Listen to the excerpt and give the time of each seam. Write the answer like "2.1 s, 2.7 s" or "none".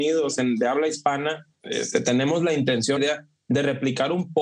3.0 s